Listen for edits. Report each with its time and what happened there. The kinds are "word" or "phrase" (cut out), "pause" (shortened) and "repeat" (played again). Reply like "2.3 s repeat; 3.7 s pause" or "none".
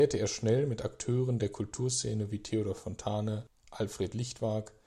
none